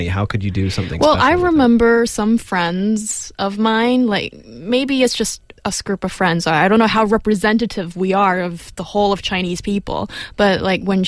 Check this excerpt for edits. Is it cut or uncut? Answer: cut